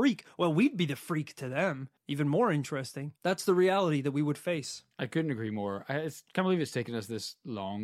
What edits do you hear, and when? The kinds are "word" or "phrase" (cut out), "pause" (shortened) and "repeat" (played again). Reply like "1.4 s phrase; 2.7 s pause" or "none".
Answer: 2.0 s pause; 3.2 s pause; 4.9 s pause